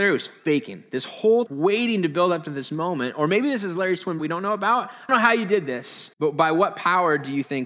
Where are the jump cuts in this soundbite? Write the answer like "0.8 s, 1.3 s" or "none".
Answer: 1.5 s, 4.2 s, 5.1 s, 6.1 s